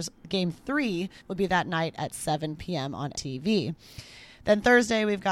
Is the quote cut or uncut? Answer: cut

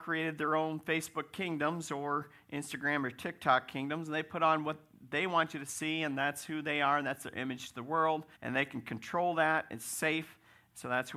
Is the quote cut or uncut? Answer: cut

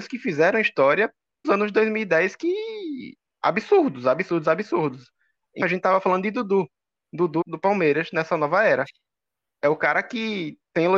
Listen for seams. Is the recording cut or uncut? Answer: cut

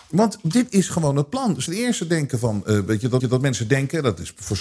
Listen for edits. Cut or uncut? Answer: cut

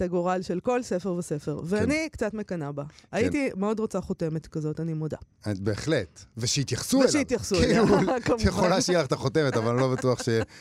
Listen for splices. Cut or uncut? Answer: uncut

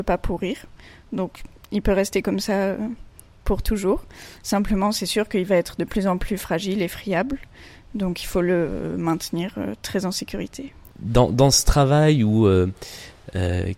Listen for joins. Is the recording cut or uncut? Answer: uncut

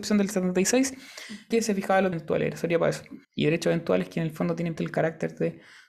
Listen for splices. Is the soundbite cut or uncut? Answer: cut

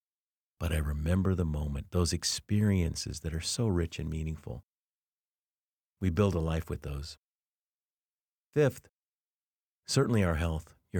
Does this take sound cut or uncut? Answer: uncut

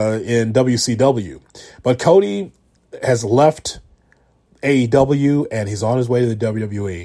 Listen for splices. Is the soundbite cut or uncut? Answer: uncut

